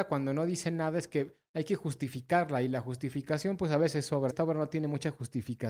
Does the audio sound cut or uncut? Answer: cut